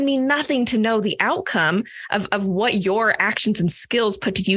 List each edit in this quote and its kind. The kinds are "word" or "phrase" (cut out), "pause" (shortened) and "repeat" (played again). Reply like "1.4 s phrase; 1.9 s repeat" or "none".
none